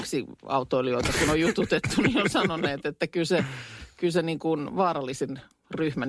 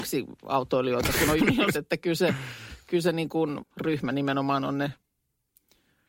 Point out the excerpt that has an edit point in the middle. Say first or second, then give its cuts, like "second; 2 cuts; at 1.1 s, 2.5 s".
second; 3 cuts; at 1.4 s, 1.7 s, 3.6 s